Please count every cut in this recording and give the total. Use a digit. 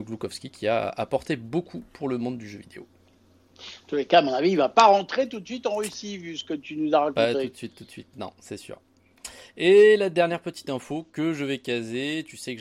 0